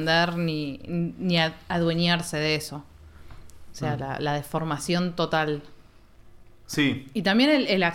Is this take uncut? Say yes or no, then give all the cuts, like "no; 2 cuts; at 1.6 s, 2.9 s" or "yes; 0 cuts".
yes; 0 cuts